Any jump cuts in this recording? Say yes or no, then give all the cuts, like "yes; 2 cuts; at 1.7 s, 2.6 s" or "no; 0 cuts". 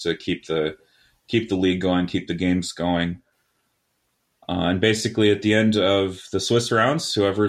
no; 0 cuts